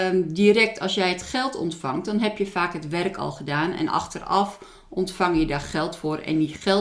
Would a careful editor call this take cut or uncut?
uncut